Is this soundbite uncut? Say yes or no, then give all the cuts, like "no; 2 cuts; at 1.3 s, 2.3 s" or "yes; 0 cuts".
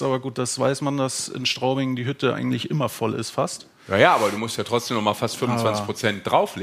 yes; 0 cuts